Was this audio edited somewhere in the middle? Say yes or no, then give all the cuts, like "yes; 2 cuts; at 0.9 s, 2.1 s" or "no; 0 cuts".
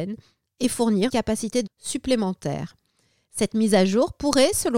yes; 2 cuts; at 1.1 s, 1.7 s